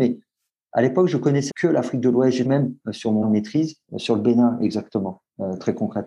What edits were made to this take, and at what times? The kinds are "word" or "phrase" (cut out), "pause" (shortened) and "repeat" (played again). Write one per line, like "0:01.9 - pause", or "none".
0:01.5 - word
0:02.4 - word
0:03.2 - word